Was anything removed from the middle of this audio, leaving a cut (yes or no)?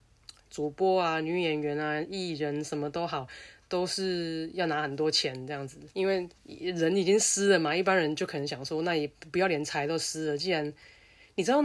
yes